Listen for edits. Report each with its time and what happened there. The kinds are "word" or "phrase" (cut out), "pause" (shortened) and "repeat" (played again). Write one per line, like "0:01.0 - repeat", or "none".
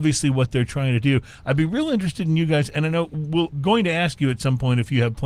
0:03.5 - word